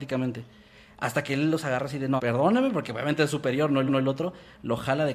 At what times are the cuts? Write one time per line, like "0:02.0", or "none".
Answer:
0:02.2
0:03.9